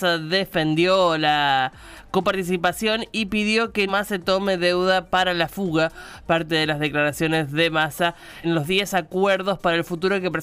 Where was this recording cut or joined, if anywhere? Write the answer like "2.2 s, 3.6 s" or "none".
3.9 s, 8.4 s